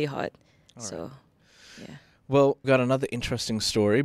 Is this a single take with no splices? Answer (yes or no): no